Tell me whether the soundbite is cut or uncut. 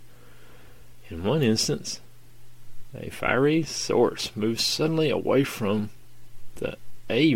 uncut